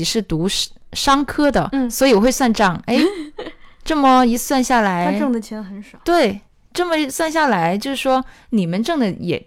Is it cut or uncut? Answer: uncut